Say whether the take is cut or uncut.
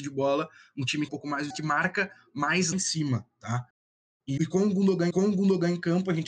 cut